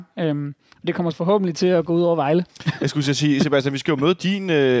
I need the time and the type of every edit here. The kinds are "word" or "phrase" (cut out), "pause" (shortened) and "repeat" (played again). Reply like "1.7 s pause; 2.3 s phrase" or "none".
1.1 s word; 2.5 s pause